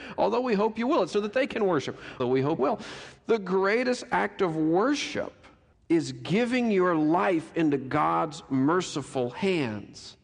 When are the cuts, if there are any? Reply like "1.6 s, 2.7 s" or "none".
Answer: 1.1 s, 2.2 s, 2.6 s, 5.7 s